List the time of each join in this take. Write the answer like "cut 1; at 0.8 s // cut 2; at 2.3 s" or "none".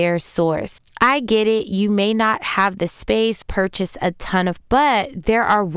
cut 1; at 3.4 s // cut 2; at 4.6 s